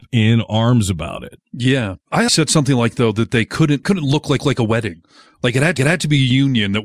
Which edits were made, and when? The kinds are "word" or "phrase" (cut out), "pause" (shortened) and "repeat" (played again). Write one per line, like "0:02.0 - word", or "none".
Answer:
0:01.4 - pause
0:02.3 - phrase
0:03.8 - phrase
0:04.4 - repeat
0:05.8 - repeat